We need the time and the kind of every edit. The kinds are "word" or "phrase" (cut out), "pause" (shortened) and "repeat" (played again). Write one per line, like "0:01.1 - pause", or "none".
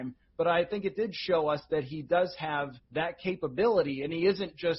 0:02.8 - pause

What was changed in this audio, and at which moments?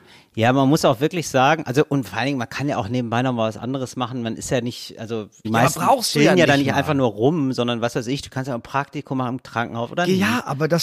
none

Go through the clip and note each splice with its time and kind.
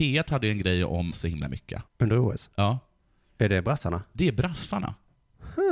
0:01.1 - phrase
0:01.9 - pause

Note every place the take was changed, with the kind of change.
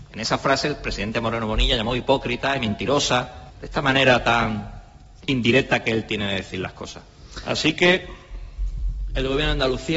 none

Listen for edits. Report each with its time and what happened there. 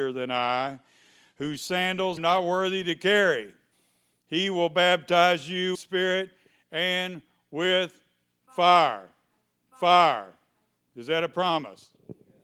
0:02.2 - phrase
0:03.7 - pause
0:05.7 - phrase
0:09.7 - repeat

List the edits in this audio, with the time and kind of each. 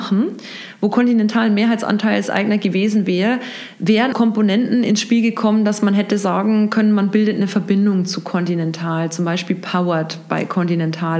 0:04.1 - word

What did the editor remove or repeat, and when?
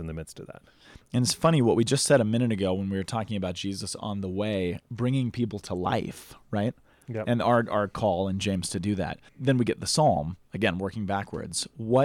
0:09.3 - pause

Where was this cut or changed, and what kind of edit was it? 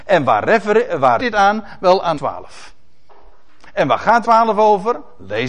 0:01.2 - word
0:02.1 - word
0:04.2 - word

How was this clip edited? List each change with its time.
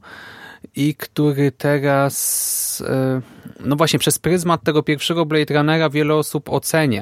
none

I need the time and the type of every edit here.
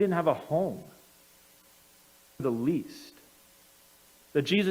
0:02.4 - phrase

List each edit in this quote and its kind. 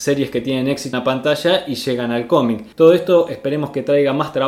0:00.9 - word
0:02.7 - pause

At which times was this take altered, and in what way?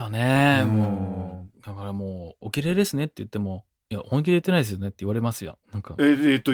0:01.5 - pause
0:05.6 - pause

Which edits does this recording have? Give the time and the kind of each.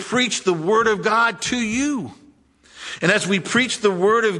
none

